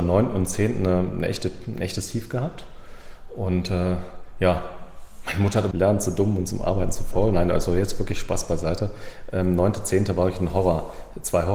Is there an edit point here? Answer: yes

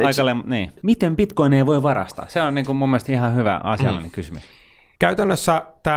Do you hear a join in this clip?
no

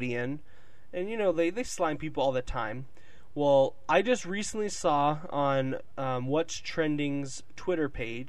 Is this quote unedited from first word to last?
yes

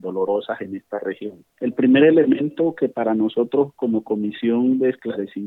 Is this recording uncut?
no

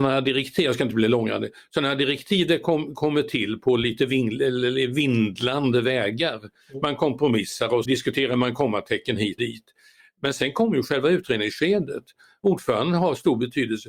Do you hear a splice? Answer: yes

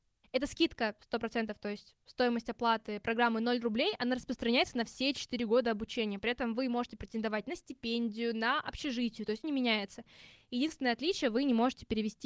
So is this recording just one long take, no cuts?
no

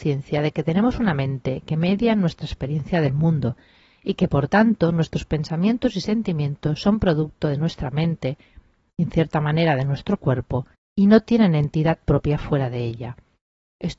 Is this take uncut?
no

